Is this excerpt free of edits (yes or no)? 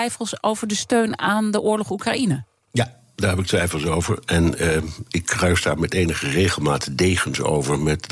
yes